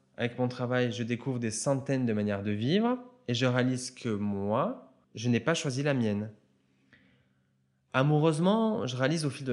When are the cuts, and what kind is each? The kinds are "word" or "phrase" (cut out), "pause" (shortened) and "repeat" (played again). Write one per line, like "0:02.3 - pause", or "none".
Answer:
0:05.0 - pause